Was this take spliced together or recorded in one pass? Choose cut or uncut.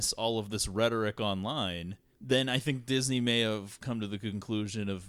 uncut